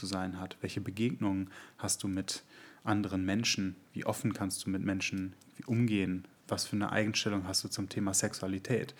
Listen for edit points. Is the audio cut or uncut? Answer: cut